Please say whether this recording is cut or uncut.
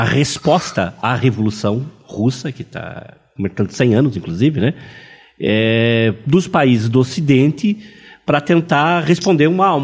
uncut